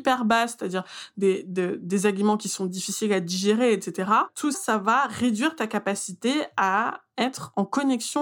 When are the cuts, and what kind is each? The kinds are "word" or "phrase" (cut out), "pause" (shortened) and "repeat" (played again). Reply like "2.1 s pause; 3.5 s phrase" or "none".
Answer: 4.5 s word